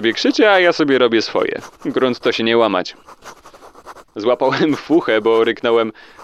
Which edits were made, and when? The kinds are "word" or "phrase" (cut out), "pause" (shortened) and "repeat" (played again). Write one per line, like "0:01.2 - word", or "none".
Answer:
0:04.1 - pause